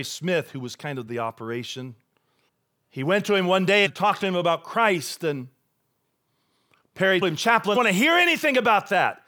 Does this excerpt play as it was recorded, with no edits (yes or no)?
no